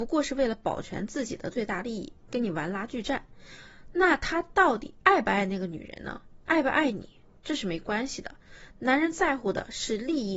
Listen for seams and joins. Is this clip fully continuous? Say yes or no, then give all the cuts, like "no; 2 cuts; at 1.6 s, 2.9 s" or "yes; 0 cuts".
no; 2 cuts; at 6.4 s, 7.4 s